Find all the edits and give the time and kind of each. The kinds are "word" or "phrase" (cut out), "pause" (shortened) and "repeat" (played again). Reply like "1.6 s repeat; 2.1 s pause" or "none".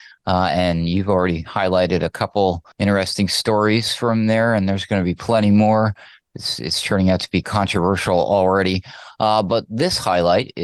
2.7 s pause; 7.4 s word